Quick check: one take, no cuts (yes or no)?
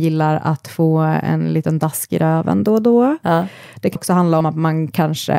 no